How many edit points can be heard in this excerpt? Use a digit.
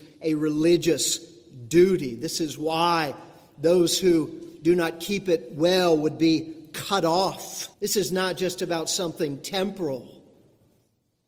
1